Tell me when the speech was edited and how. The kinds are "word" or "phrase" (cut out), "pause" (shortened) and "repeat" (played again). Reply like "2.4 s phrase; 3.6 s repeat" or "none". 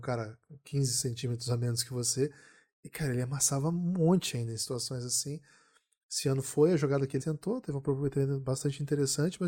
7.2 s word